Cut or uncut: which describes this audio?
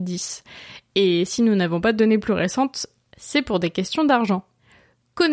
uncut